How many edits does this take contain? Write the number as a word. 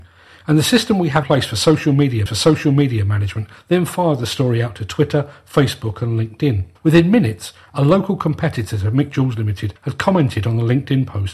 four